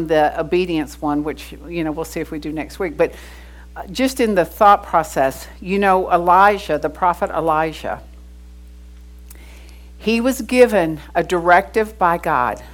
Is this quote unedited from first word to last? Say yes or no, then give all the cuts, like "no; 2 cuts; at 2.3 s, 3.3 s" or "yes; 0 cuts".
yes; 0 cuts